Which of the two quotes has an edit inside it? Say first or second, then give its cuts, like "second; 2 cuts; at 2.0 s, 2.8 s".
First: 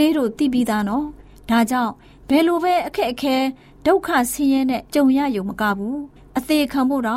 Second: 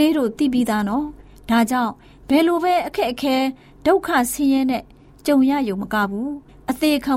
first; 1 cut; at 4.9 s